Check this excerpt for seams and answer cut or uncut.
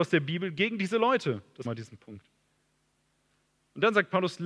cut